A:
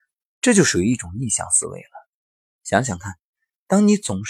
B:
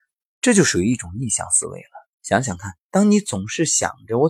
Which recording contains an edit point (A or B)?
B